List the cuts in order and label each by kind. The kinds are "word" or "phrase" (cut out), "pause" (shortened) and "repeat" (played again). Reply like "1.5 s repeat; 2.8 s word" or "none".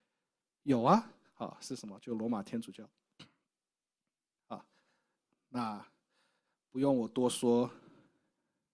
none